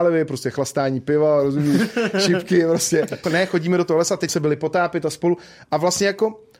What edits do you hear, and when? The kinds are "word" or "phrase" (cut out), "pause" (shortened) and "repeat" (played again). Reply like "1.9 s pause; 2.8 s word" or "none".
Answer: 3.2 s word; 4.3 s word